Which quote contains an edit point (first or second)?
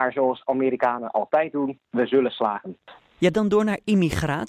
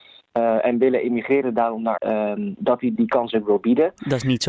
second